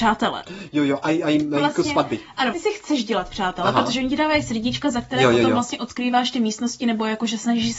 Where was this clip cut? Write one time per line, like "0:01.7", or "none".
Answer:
0:02.5